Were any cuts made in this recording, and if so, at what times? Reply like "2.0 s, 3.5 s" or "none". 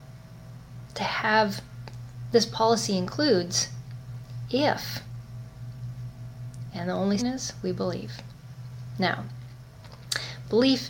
2.3 s, 7.2 s